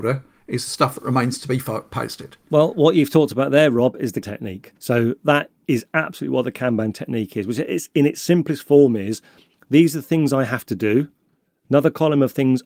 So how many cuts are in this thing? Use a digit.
2